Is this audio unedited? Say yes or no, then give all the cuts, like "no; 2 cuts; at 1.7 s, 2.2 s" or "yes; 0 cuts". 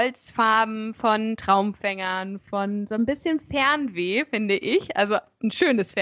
yes; 0 cuts